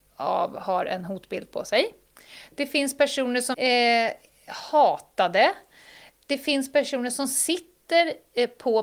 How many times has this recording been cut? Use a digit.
1